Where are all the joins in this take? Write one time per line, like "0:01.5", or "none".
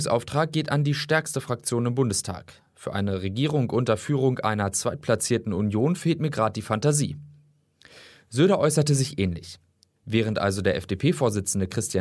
none

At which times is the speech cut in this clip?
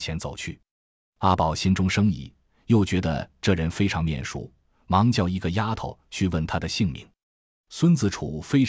none

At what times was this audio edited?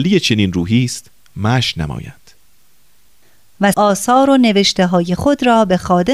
0:03.7

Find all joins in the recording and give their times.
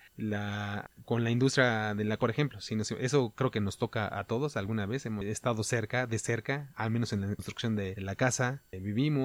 0:02.2

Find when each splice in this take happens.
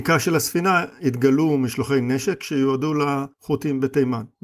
0:03.3

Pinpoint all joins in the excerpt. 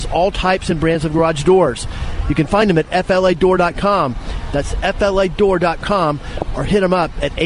none

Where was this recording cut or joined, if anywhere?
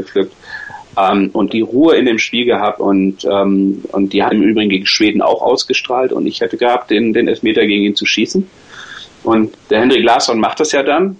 0:01.5
0:02.8
0:04.3
0:06.6
0:09.5

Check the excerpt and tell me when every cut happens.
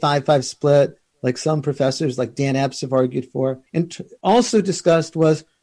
0:03.7

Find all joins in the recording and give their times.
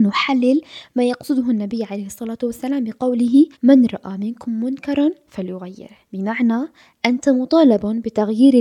0:03.5
0:06.1

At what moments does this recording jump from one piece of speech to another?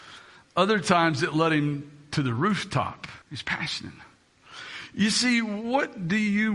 0:03.2

